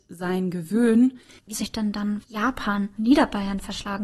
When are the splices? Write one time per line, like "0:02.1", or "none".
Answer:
0:01.5
0:02.2
0:03.0